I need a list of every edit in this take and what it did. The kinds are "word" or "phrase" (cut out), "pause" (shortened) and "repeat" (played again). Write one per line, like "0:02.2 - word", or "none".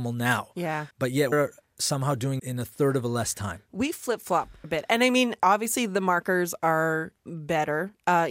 0:00.9 - pause
0:01.3 - word
0:02.4 - word
0:04.6 - word
0:07.2 - pause